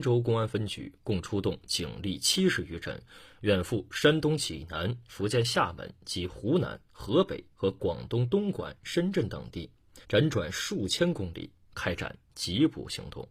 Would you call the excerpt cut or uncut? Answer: cut